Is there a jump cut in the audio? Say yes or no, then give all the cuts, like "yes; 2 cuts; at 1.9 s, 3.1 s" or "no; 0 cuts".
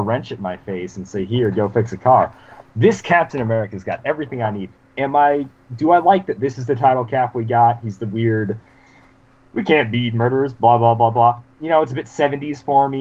no; 0 cuts